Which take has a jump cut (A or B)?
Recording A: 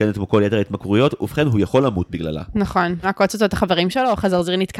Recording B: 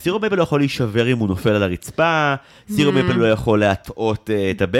A